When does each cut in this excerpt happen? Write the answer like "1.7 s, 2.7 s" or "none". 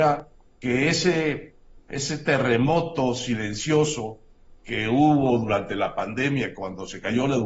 none